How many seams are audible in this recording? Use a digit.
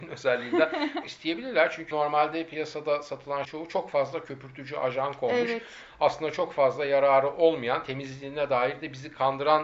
3